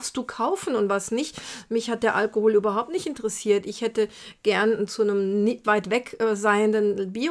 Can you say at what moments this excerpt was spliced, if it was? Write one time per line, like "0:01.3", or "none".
0:04.9
0:05.6